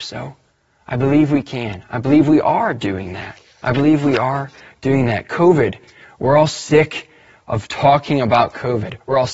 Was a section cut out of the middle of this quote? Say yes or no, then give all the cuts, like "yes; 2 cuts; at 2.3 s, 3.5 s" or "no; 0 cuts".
yes; 1 cut; at 3.4 s